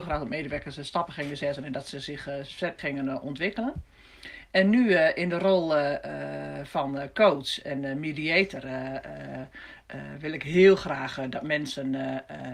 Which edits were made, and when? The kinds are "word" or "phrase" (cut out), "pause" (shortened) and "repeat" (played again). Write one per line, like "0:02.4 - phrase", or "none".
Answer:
0:02.8 - word